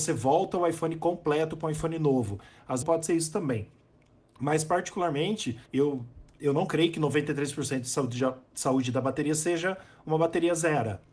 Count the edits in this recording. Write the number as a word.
two